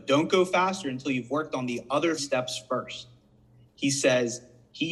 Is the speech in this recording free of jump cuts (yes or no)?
no